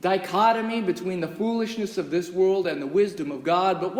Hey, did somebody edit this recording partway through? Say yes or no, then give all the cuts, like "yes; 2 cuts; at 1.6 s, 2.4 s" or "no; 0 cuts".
no; 0 cuts